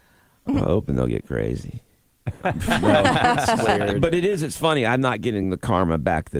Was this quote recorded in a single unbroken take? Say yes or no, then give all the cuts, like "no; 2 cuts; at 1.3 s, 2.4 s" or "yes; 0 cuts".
yes; 0 cuts